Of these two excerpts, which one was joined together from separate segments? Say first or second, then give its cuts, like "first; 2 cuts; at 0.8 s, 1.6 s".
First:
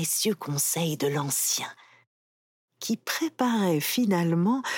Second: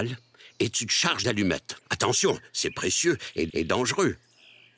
second; 3 cuts; at 1.2 s, 1.8 s, 3.5 s